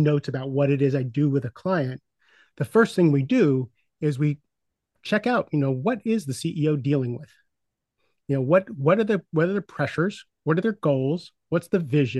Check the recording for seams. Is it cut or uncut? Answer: uncut